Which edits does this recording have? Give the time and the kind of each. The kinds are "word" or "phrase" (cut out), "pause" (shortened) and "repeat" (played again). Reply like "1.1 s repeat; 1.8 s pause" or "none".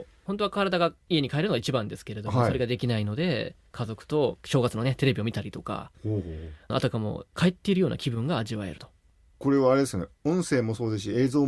1.0 s pause